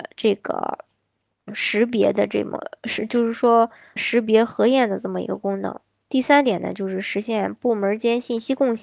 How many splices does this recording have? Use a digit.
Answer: 2